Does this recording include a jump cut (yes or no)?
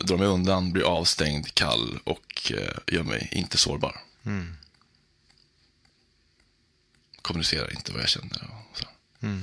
no